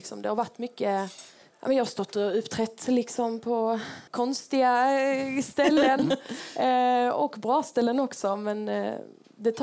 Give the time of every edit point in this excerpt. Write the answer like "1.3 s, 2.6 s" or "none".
1.4 s, 4.1 s